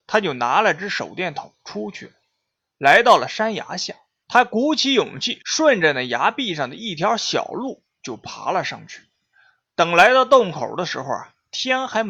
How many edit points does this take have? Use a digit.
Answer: 0